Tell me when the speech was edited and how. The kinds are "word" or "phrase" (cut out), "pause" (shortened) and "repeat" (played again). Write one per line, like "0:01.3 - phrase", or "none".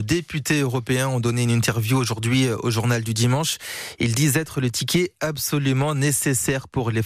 none